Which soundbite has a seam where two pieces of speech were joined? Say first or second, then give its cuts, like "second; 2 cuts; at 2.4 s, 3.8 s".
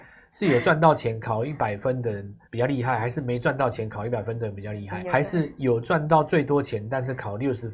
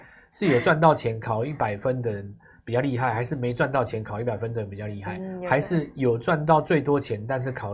first; 2 cuts; at 2.4 s, 5.0 s